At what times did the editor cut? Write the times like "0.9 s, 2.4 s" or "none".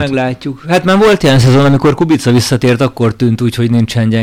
none